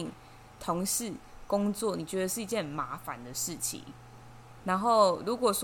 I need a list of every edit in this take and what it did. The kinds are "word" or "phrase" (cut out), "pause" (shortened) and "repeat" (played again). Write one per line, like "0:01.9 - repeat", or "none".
0:04.6 - word